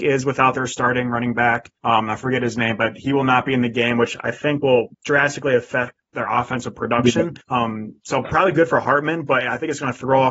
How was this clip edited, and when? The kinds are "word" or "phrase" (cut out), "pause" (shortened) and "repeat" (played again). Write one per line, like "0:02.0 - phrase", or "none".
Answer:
0:01.8 - pause
0:04.9 - pause
0:07.4 - pause